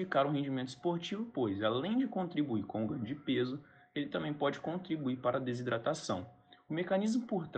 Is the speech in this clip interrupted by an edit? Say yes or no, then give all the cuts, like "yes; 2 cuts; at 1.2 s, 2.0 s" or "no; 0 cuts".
no; 0 cuts